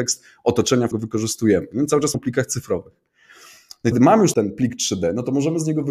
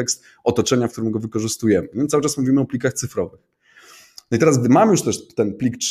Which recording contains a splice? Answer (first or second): first